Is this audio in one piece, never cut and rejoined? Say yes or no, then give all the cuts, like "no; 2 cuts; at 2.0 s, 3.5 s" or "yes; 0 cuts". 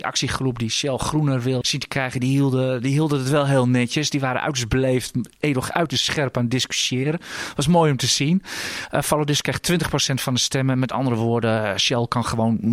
no; 1 cut; at 1.6 s